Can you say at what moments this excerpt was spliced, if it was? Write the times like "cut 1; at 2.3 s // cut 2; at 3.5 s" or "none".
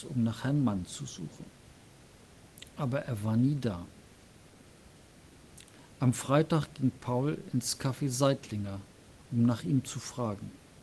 none